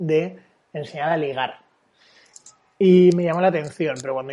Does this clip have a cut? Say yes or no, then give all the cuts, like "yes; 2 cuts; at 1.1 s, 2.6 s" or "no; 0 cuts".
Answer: no; 0 cuts